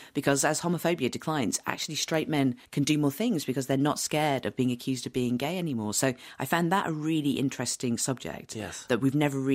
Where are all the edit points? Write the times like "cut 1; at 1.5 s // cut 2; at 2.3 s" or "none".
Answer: cut 1; at 2.6 s